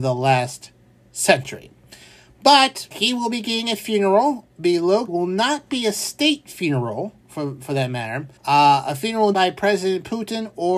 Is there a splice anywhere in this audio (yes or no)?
yes